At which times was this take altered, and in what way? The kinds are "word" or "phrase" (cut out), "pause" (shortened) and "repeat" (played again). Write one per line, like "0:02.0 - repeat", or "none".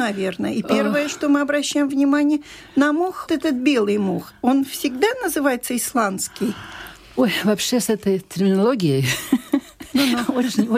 0:03.3 - word